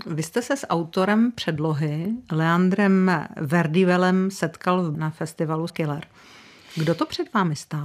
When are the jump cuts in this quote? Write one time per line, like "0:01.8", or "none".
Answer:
0:04.9
0:05.7